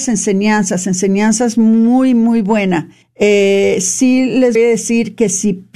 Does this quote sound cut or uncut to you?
cut